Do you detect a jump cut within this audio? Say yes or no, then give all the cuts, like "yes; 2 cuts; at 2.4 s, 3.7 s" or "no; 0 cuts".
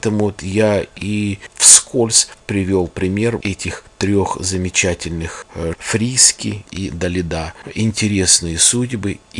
yes; 4 cuts; at 1.5 s, 3.4 s, 5.7 s, 6.6 s